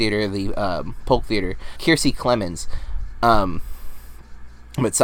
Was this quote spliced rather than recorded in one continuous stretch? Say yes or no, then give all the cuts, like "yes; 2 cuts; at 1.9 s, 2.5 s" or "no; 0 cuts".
yes; 1 cut; at 1.8 s